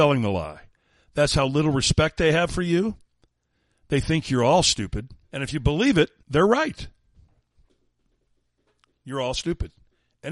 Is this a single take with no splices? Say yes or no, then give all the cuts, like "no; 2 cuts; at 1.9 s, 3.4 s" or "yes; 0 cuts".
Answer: no; 2 cuts; at 5.2 s, 6.2 s